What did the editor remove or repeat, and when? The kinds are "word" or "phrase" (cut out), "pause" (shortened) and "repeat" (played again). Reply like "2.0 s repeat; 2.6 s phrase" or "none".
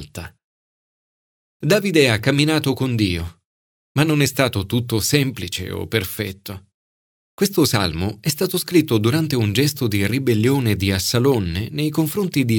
none